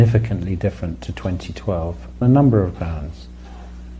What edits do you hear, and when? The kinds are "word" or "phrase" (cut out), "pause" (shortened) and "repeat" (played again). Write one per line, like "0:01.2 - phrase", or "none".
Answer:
0:02.2 - word

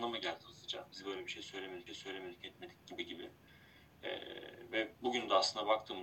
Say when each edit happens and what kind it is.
0:01.9 - repeat

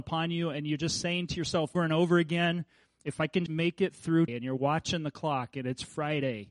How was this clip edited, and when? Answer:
0:01.7 - word
0:03.5 - word
0:04.3 - word

